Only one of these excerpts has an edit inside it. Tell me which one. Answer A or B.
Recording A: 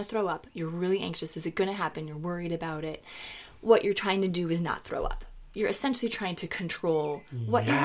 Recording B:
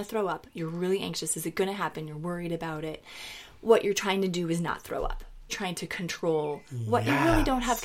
B